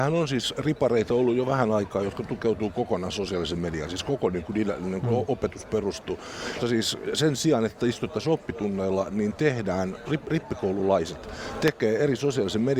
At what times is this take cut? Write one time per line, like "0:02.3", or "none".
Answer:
0:06.6